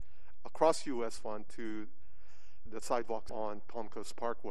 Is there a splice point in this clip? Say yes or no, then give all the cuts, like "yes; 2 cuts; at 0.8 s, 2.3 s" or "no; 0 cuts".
yes; 2 cuts; at 2.7 s, 3.3 s